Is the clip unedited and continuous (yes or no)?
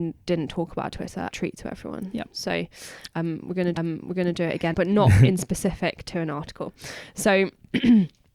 no